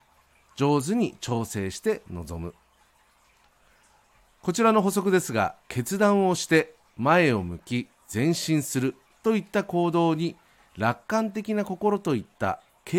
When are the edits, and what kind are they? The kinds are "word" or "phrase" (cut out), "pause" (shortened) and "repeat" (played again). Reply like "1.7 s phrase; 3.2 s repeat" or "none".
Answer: 5.6 s pause